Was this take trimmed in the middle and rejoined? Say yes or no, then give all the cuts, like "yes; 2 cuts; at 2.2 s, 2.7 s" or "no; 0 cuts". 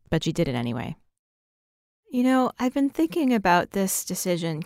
no; 0 cuts